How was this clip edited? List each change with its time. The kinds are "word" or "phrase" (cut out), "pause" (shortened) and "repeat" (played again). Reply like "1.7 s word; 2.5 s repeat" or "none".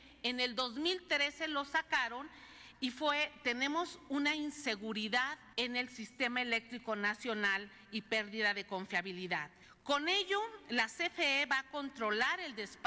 5.5 s pause; 9.6 s pause